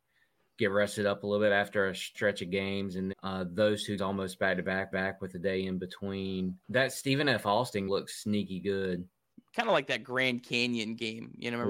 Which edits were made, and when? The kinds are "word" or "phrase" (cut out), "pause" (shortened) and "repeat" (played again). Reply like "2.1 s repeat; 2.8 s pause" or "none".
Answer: 2.1 s word; 3.1 s word; 4.0 s word; 4.9 s repeat; 6.6 s pause; 7.9 s word; 9.3 s pause